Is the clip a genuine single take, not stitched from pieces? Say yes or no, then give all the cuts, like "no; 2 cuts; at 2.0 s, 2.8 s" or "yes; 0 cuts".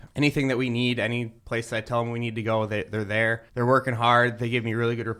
no; 2 cuts; at 1.4 s, 3.5 s